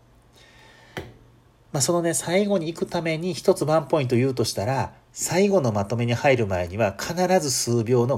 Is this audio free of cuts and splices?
yes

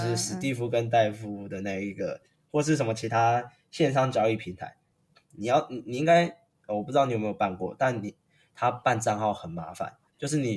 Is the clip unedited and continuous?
yes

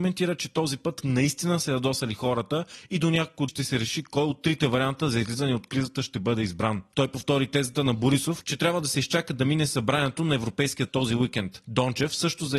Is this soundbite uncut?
no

